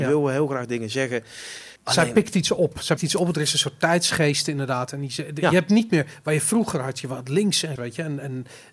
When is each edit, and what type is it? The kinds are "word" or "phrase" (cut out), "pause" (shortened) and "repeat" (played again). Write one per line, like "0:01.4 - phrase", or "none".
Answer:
0:01.8 - pause
0:03.0 - word
0:07.8 - word

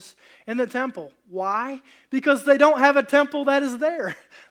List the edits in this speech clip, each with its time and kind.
none

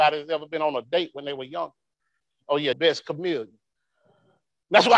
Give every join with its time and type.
0:02.2 - pause
0:02.7 - phrase

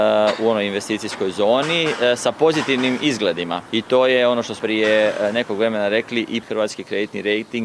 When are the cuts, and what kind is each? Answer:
0:03.7 - pause
0:04.6 - word
0:06.4 - phrase

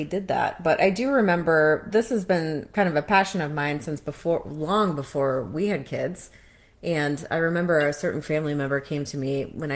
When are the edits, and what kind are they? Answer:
none

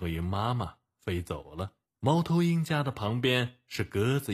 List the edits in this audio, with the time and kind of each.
0:01.9 - pause

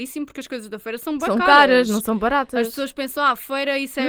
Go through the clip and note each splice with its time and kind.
none

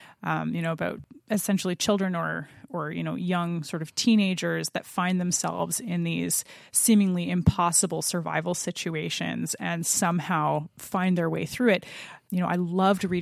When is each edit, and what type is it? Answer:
none

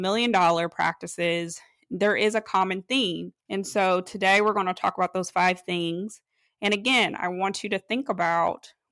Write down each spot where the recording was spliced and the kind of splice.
0:03.4 - pause

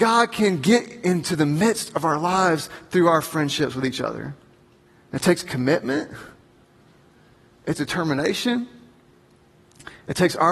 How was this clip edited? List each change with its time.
0:04.9 - pause
0:07.7 - word

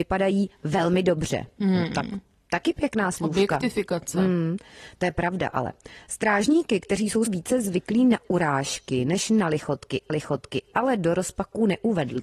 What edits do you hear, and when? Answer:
0:07.3 - word
0:10.1 - repeat

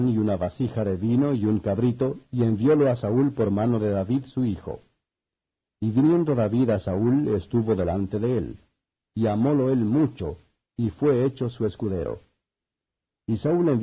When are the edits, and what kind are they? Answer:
none

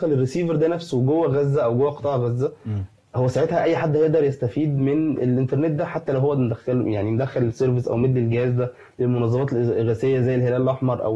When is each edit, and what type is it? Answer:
none

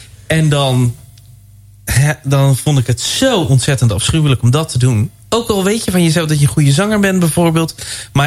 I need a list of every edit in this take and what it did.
0:05.2 - pause

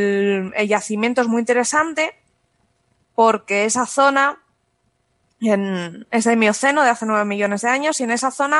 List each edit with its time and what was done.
none

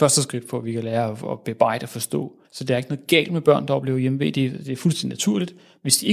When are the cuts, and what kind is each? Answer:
0:02.4 - pause

